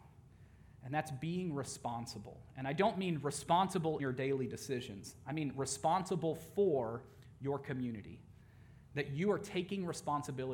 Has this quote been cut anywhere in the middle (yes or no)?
yes